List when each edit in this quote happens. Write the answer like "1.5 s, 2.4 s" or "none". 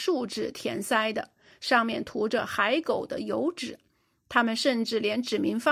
none